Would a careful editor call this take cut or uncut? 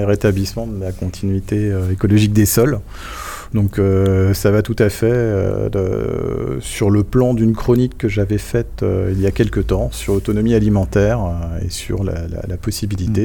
uncut